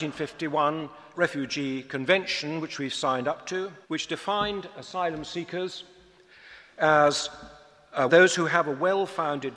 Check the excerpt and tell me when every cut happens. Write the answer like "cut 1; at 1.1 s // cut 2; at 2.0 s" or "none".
cut 1; at 1.1 s // cut 2; at 3.8 s // cut 3; at 8.1 s